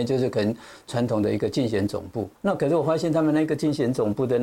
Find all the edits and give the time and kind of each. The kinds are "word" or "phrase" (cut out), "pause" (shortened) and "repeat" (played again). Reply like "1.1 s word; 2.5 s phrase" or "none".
2.4 s pause